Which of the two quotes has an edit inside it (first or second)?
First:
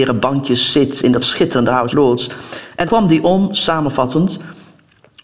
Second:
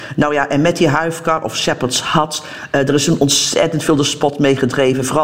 first